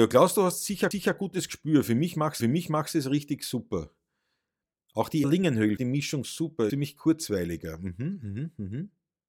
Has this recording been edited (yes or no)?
yes